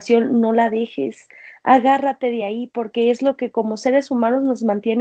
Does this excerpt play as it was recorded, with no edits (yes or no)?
yes